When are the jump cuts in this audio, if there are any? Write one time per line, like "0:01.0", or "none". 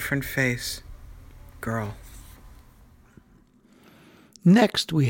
0:01.6